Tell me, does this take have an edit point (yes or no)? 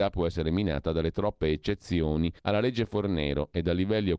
yes